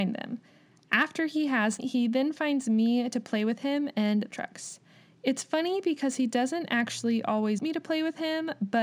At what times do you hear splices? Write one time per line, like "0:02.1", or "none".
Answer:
0:01.8
0:04.3
0:07.6